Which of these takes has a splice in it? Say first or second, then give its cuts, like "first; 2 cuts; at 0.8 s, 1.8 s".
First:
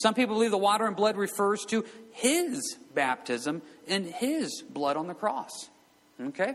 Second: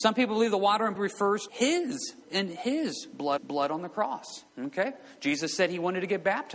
second; 5 cuts; at 1.0 s, 1.5 s, 2.2 s, 3.4 s, 4.5 s